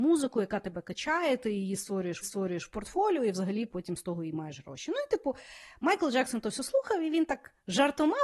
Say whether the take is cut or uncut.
cut